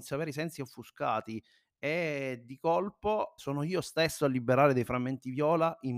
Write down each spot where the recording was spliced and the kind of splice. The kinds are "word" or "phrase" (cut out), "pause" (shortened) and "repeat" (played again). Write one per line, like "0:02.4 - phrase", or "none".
0:03.4 - word